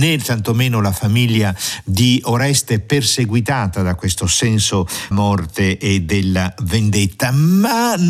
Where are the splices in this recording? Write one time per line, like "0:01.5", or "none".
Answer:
0:05.1